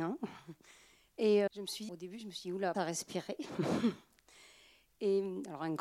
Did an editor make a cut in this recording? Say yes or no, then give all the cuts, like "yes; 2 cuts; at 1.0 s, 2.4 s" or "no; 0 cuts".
yes; 3 cuts; at 1.5 s, 1.9 s, 2.7 s